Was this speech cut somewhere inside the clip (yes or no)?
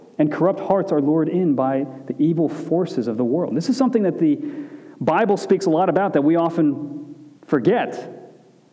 yes